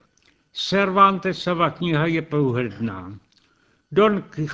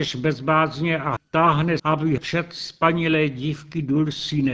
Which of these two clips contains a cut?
second; 3 cuts; at 1.2 s, 1.8 s, 2.2 s

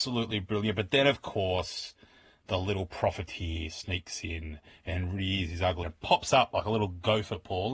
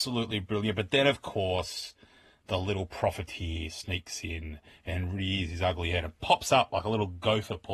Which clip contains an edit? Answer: first; 1 cut; at 5.8 s

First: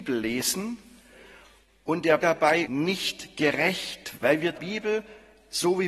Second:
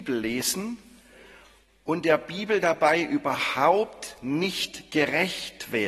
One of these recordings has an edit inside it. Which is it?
first; 4 cuts; at 2.2 s, 2.6 s, 4.1 s, 4.5 s

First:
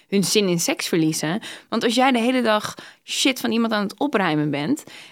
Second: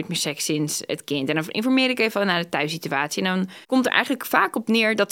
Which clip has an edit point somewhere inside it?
second; 1 cut; at 3.6 s

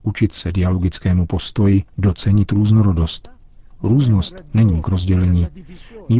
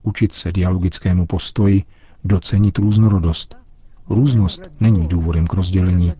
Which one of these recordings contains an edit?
first; 2 cuts; at 1.9 s, 4.8 s

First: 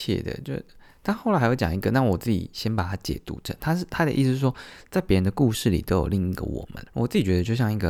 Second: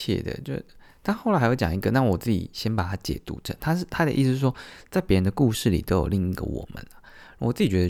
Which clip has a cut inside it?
first; 1 cut; at 6.9 s

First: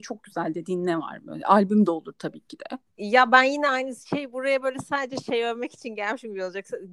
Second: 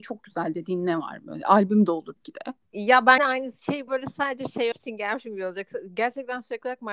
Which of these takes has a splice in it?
second; 4 cuts; at 2.2 s, 3.2 s, 3.9 s, 4.7 s

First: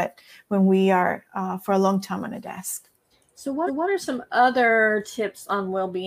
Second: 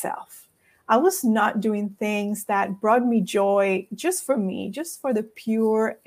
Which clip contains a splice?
first; 2 cuts; at 3.1 s, 3.7 s

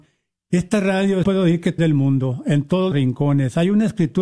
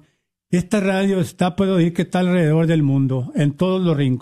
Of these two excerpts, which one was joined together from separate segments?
first; 3 cuts; at 1.2 s, 1.8 s, 2.9 s

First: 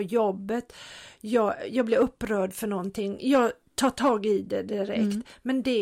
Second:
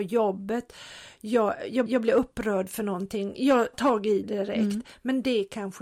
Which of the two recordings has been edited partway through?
second; 3 cuts; at 1.9 s, 3.7 s, 4.2 s

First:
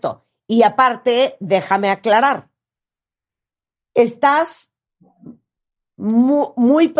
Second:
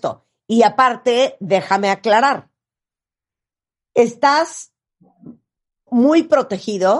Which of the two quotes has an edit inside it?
second; 1 cut; at 5.9 s

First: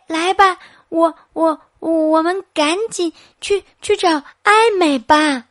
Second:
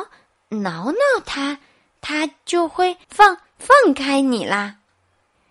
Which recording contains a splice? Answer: second; 1 cut; at 3.0 s

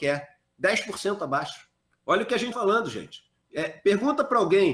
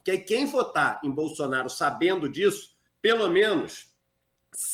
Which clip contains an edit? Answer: first; 3 cuts; at 1.8 s, 2.5 s, 3.4 s

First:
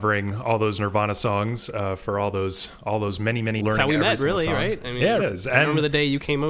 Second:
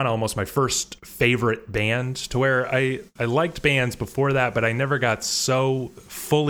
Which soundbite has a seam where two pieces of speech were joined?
first; 2 cuts; at 3.6 s, 5.2 s

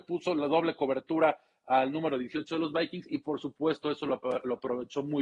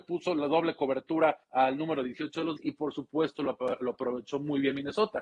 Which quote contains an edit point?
second; 3 cuts; at 1.4 s, 2.6 s, 3.4 s

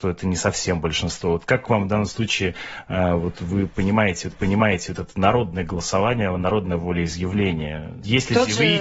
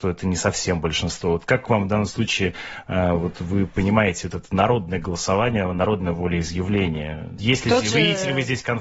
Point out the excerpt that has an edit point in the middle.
first; 1 cut; at 4.3 s

